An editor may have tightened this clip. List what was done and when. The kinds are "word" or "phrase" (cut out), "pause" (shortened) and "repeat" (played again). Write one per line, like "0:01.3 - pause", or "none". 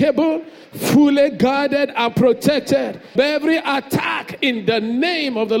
0:03.2 - word

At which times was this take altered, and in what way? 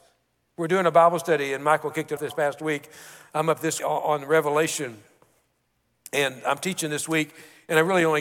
0:02.2 - word
0:03.8 - word

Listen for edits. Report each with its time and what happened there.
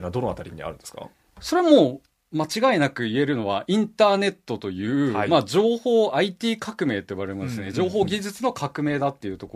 none

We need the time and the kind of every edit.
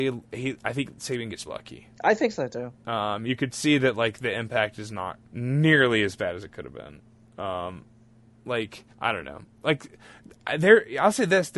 0:01.5 - word
0:01.9 - pause
0:05.2 - pause
0:08.9 - pause

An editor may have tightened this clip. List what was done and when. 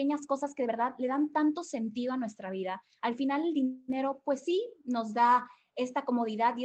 none

